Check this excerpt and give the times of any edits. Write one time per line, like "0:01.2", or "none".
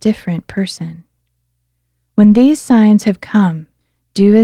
none

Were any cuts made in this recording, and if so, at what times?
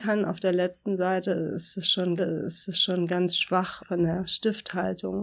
0:02.2
0:03.8

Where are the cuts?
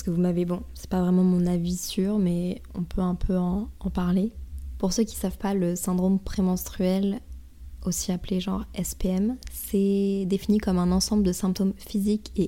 none

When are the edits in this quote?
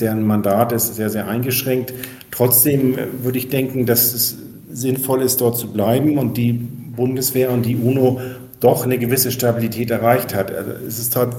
none

